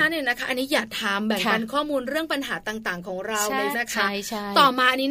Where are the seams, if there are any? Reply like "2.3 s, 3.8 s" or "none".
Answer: 3.7 s

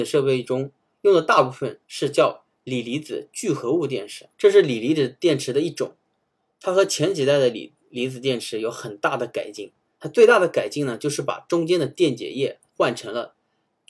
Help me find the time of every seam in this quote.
1.8 s, 4.3 s, 12.7 s

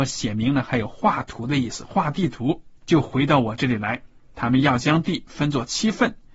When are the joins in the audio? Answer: 2.8 s

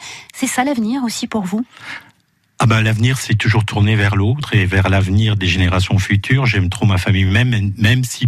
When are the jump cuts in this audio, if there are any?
none

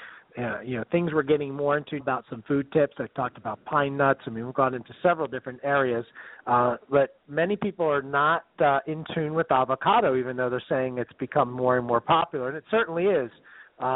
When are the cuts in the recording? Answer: 2.0 s

